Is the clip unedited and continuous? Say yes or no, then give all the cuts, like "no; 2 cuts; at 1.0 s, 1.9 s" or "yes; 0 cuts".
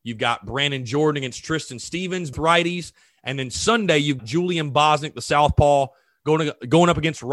no; 2 cuts; at 2.3 s, 4.2 s